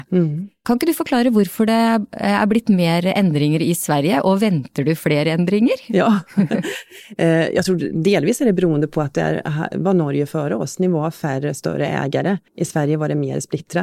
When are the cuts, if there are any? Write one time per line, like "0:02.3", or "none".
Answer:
0:12.5